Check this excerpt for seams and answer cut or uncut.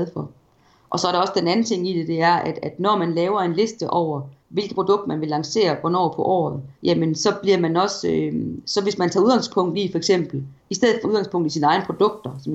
cut